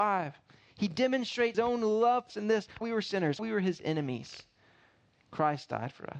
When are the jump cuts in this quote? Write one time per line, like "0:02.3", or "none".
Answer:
0:01.5
0:02.3
0:02.8
0:03.4